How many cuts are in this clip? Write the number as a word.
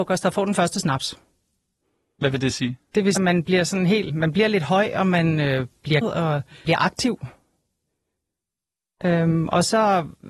four